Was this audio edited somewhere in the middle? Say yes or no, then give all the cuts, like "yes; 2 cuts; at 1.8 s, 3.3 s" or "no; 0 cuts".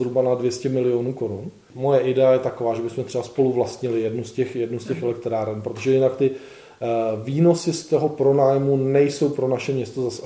no; 0 cuts